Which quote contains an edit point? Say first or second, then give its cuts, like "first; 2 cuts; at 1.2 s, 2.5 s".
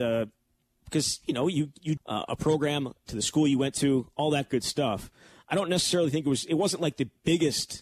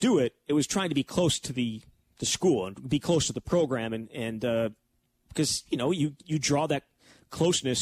first; 1 cut; at 2.0 s